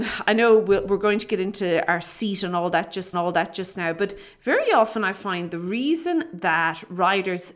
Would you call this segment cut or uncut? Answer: cut